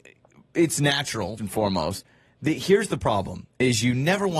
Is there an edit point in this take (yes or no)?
yes